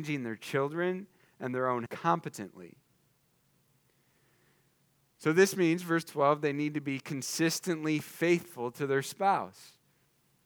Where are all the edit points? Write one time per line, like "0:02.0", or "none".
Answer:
0:01.9